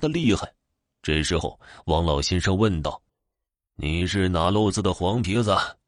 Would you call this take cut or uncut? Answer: cut